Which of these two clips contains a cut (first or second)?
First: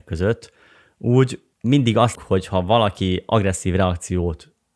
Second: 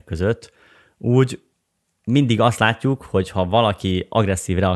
first